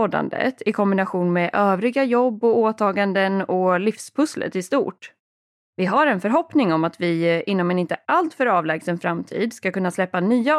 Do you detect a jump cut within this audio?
no; 0 cuts

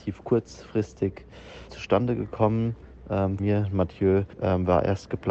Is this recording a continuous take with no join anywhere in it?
no; 3 cuts; at 1.7 s, 3.4 s, 4.3 s

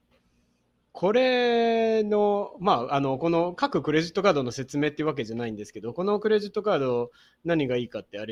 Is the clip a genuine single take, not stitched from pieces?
yes; 0 cuts

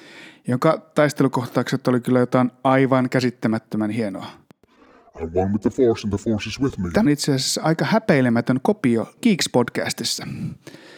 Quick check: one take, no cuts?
no; 2 cuts; at 7.1 s, 9.2 s

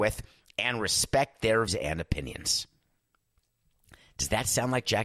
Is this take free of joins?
no; 1 cut; at 1.7 s

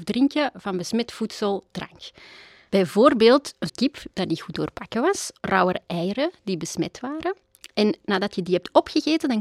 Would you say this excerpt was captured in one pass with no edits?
no; 3 cuts; at 1.7 s, 3.7 s, 5.4 s

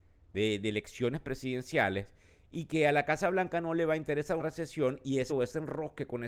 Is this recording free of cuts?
no; 2 cuts; at 4.4 s, 5.3 s

